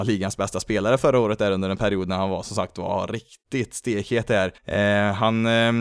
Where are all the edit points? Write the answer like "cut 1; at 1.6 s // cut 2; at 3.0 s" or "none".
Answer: cut 1; at 4.6 s